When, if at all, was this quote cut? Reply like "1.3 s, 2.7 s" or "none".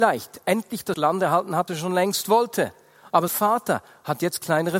0.9 s, 1.7 s, 3.3 s